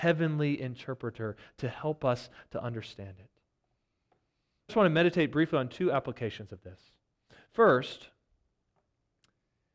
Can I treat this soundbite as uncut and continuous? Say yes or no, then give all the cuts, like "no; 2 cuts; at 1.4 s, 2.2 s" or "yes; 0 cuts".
no; 1 cut; at 4.7 s